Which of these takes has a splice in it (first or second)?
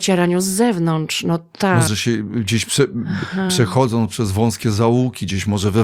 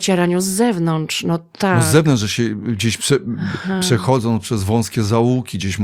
first